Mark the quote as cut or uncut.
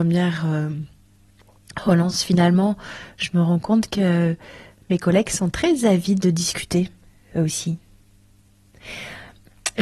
cut